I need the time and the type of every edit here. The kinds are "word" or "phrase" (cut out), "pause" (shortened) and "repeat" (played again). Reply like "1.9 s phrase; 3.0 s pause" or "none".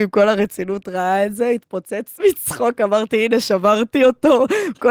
none